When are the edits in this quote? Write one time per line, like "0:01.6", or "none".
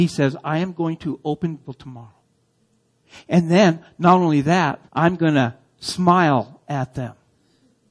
0:01.6
0:04.9